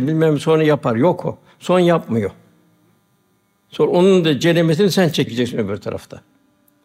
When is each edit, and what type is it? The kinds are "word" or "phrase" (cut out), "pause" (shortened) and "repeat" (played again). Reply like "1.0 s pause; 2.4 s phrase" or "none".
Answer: none

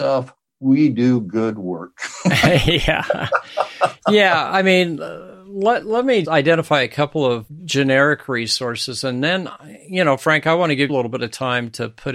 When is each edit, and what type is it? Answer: 6.2 s word; 10.9 s word

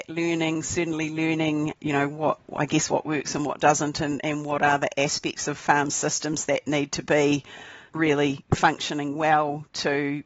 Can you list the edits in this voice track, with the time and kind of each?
none

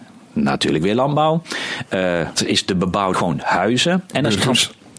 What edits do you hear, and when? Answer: 2.4 s word; 3.1 s word

